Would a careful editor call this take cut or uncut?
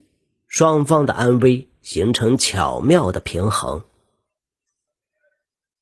uncut